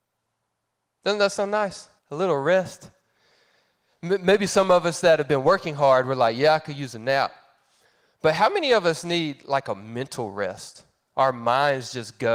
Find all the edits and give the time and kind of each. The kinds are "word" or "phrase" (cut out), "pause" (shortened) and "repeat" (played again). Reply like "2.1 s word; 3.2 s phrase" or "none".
2.0 s pause